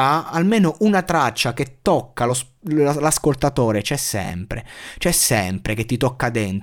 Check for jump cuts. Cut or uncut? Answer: uncut